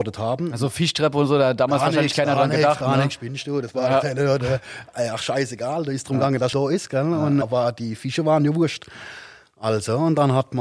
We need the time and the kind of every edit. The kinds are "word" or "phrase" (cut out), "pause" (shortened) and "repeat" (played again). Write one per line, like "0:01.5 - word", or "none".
0:06.5 - word
0:07.4 - word